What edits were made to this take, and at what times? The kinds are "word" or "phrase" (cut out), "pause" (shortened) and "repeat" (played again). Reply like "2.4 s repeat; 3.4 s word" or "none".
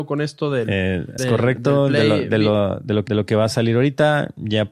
1.2 s word; 3.1 s repeat